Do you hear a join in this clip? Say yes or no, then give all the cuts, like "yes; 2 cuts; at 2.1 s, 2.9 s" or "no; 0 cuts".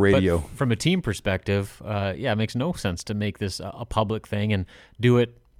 no; 0 cuts